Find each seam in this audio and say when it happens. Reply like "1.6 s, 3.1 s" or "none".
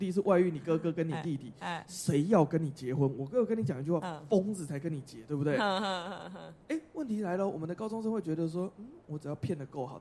none